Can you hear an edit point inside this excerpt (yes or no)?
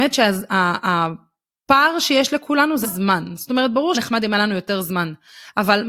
yes